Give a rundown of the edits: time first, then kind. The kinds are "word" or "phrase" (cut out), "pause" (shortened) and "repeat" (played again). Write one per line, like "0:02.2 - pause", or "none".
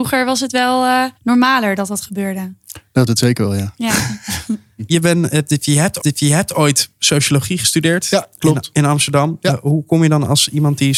0:01.2 - pause
0:03.1 - word
0:04.9 - word
0:06.0 - repeat